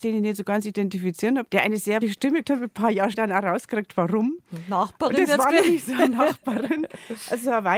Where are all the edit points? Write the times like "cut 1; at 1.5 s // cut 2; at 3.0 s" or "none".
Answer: cut 1; at 1.5 s // cut 2; at 2.0 s // cut 3; at 2.4 s // cut 4; at 3.1 s